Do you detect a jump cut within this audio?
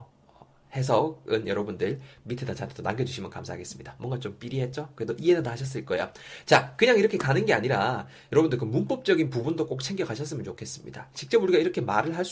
no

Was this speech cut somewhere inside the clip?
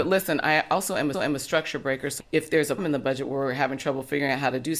yes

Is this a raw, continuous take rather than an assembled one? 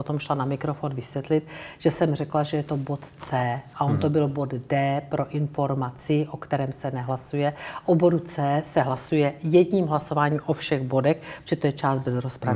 yes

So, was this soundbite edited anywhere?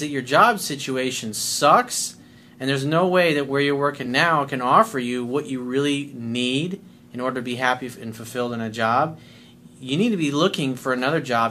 no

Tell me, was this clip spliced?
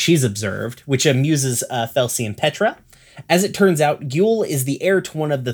no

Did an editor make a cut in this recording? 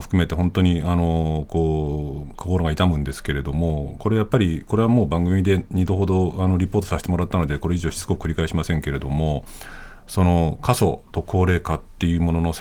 no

